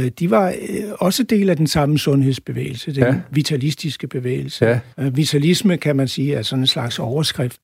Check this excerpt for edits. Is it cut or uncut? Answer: cut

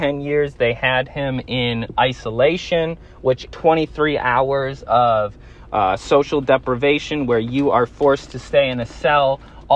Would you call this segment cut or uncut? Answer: cut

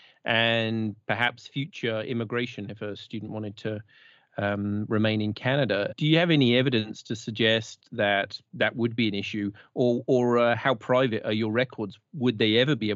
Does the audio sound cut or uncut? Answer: uncut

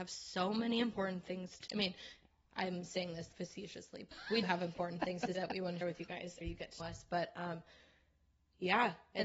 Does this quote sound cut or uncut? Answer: cut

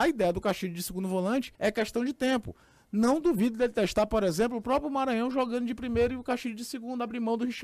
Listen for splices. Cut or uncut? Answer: cut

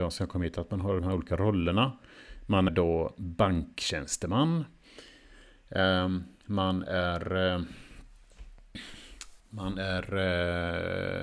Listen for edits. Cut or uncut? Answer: cut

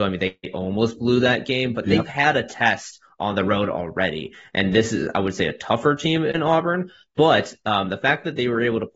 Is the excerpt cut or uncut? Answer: uncut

